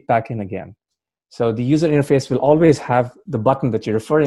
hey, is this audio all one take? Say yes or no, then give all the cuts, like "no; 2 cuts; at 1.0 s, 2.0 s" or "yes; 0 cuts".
yes; 0 cuts